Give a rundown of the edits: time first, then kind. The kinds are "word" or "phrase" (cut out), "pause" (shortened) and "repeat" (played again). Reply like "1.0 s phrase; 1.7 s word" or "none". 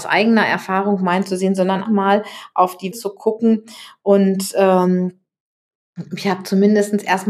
1.8 s word; 2.9 s phrase